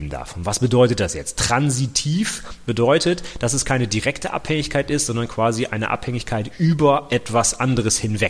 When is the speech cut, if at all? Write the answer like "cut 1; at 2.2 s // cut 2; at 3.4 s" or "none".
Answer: none